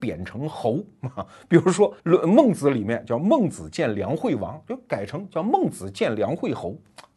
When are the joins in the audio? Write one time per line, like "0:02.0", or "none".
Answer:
0:02.0